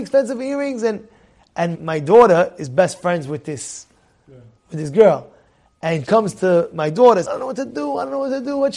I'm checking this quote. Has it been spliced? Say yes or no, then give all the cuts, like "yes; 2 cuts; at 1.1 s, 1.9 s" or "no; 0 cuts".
yes; 3 cuts; at 1.7 s, 6.1 s, 7.2 s